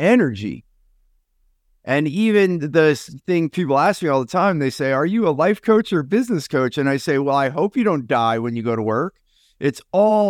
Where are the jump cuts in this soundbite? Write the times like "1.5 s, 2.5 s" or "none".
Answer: none